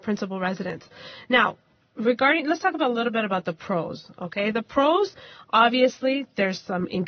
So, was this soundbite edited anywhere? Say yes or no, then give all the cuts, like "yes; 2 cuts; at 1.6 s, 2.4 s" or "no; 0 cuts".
no; 0 cuts